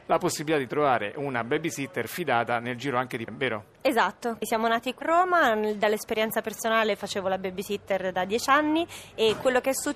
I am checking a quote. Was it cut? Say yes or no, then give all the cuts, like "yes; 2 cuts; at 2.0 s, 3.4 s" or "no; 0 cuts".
yes; 2 cuts; at 3.3 s, 5.0 s